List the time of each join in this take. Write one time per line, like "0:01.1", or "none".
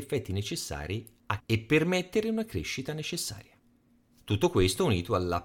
0:01.4